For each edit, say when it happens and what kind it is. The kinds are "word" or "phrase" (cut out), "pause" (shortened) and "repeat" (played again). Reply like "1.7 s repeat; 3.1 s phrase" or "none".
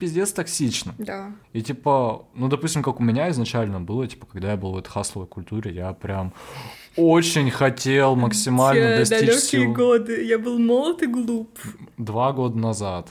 1.4 s pause

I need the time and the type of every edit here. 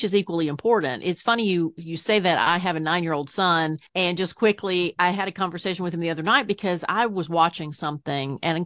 3.9 s pause

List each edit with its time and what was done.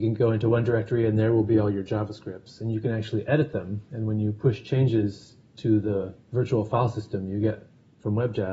none

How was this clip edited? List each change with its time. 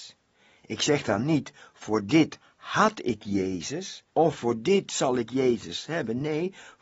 4.1 s pause

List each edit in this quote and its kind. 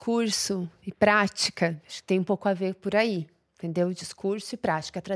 none

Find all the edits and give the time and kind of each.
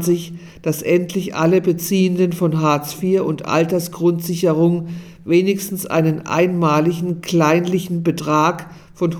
none

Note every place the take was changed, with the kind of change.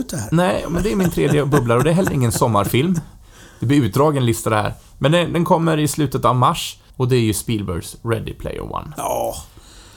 6.9 s pause

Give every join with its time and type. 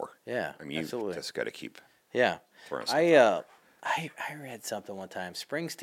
none

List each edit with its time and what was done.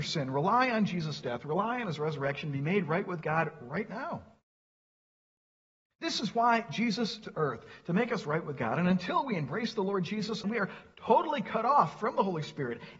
7.2 s word; 10.4 s word

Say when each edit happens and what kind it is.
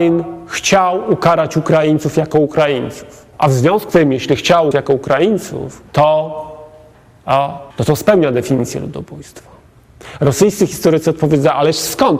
3.3 s pause; 3.9 s word; 4.7 s phrase; 5.9 s pause; 7.7 s pause

